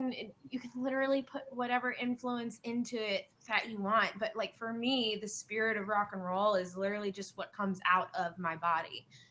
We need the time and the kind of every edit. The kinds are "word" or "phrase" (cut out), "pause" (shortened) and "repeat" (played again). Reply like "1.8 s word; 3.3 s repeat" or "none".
none